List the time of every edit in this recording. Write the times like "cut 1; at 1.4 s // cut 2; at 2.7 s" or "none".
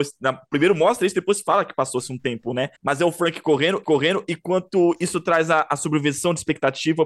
cut 1; at 2.8 s // cut 2; at 3.8 s